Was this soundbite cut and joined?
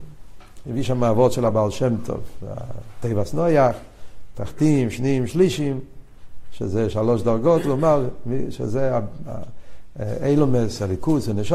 no; 0 cuts

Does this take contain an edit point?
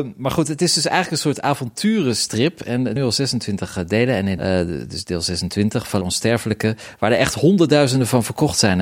yes; 3 cuts; at 3.0 s, 4.4 s, 6.0 s

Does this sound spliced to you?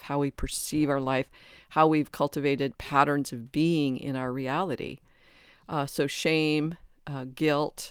no; 0 cuts

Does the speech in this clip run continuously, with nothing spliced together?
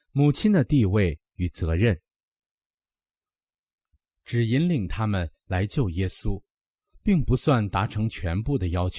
yes; 0 cuts

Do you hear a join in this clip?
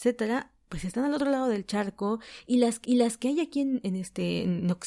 yes; 1 cut; at 2.8 s

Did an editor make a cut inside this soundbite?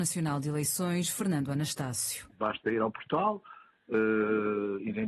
no; 0 cuts

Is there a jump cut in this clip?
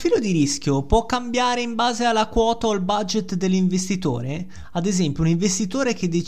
no; 0 cuts

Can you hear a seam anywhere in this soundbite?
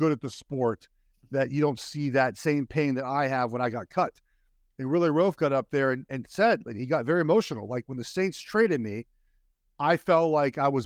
no; 0 cuts

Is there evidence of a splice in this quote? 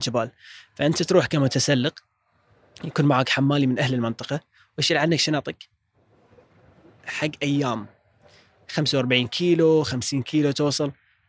no; 0 cuts

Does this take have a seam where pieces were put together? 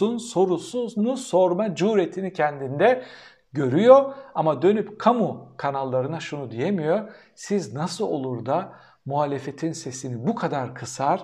no; 0 cuts

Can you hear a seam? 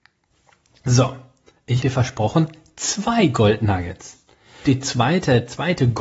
yes; 2 cuts; at 1.8 s, 4.6 s

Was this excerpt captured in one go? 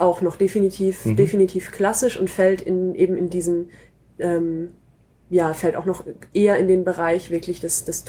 yes; 0 cuts

